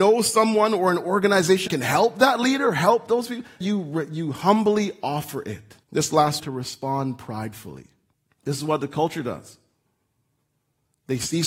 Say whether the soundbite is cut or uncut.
cut